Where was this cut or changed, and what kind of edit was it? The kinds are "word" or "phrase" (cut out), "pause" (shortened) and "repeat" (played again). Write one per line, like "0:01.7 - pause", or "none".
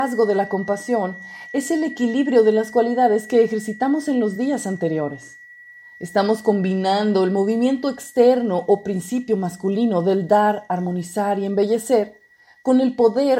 none